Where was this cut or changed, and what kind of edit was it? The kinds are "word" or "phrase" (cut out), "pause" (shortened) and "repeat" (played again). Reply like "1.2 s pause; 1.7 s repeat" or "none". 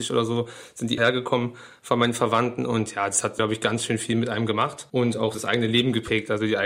1.0 s phrase; 5.3 s word